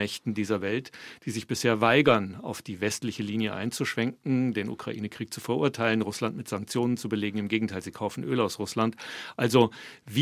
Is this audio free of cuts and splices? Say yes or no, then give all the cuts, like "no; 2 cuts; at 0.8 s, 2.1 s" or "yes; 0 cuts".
yes; 0 cuts